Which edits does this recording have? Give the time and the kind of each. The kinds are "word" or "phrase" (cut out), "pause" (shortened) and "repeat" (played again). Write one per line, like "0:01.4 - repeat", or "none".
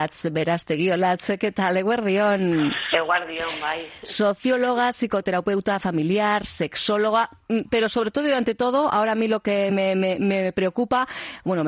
none